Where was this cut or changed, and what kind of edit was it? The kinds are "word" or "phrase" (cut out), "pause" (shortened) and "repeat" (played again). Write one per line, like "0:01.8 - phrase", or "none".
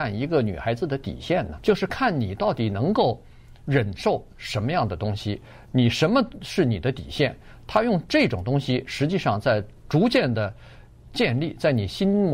0:01.6 - word